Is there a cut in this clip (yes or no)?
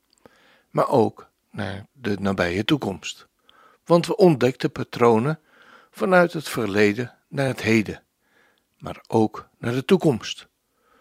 no